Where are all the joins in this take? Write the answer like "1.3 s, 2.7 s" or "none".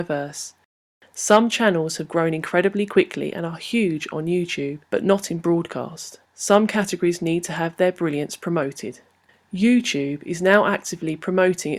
4.8 s, 6.2 s, 9.2 s